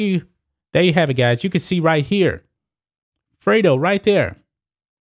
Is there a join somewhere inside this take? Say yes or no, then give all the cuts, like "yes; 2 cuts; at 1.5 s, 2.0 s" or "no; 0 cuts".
no; 0 cuts